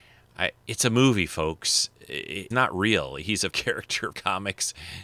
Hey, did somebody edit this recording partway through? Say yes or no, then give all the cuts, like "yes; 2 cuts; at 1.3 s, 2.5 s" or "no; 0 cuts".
yes; 3 cuts; at 2.5 s, 3.5 s, 4.1 s